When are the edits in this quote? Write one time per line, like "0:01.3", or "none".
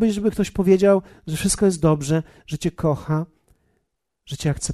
none